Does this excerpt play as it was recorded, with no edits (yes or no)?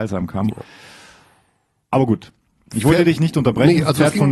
yes